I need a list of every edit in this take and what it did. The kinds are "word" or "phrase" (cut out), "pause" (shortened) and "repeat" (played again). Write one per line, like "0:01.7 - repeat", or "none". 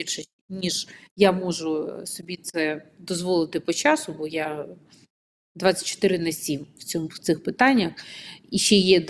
none